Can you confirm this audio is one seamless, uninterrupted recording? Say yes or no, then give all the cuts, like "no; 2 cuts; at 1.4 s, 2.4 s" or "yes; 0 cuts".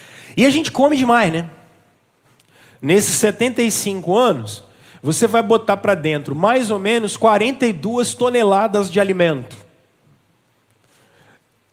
yes; 0 cuts